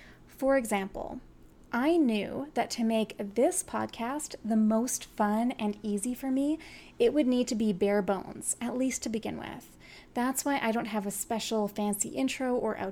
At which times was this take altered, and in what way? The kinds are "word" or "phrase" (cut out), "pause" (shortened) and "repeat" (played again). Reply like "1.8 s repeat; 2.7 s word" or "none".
none